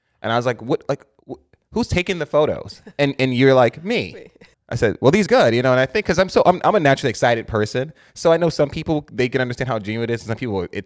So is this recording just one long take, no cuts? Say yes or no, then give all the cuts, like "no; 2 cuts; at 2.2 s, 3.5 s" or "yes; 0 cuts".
no; 3 cuts; at 1.2 s, 4.5 s, 5.3 s